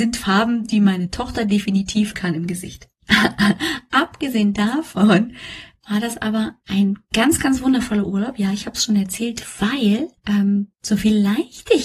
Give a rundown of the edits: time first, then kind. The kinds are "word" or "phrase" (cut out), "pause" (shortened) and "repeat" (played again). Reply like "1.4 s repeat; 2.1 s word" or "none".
2.1 s word; 2.9 s pause; 6.6 s pause; 10.2 s pause

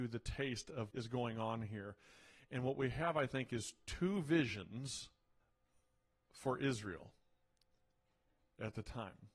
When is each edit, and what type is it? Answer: 0.9 s word; 5.4 s pause

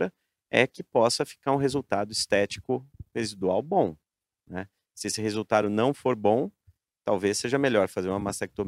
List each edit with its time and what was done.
none

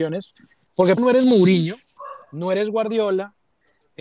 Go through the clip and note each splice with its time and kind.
1.0 s word

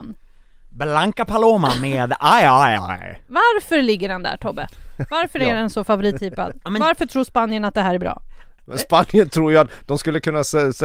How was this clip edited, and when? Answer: none

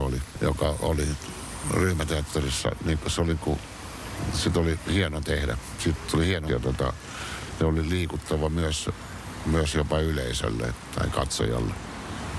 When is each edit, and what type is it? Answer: 6.5 s word; 7.6 s word

